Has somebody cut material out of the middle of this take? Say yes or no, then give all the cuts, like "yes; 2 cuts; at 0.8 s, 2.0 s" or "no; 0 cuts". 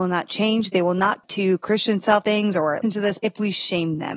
yes; 4 cuts; at 1.2 s, 2.2 s, 2.8 s, 3.2 s